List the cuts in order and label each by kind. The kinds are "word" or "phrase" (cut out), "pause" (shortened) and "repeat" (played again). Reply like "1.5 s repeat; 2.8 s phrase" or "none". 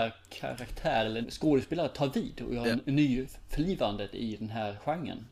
1.2 s word